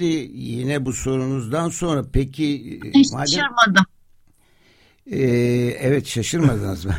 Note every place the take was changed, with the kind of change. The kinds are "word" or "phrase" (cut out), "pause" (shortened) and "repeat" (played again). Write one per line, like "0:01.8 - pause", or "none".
none